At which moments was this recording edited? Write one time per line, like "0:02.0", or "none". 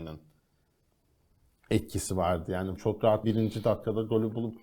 0:02.8
0:03.2

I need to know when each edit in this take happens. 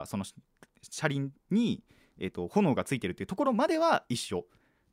none

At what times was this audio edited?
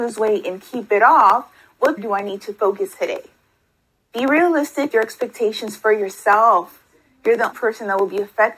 0:02.0
0:02.9
0:04.9
0:07.5

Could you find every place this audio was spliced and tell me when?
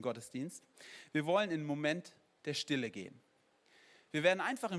none

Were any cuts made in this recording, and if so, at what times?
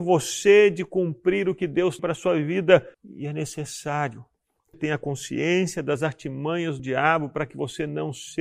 0:02.0
0:02.9
0:04.7
0:06.8

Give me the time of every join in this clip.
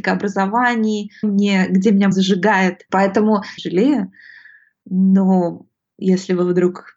0:01.2
0:02.1
0:03.6

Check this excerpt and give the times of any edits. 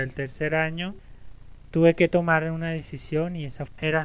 none

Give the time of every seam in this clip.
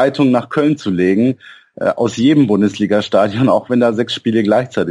none

